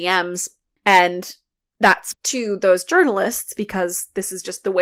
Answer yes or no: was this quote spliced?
yes